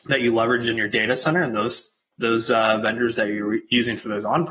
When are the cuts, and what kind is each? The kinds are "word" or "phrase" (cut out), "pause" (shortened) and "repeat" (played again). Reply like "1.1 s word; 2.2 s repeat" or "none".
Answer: none